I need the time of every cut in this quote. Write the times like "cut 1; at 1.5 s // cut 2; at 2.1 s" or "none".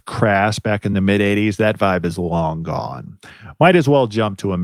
none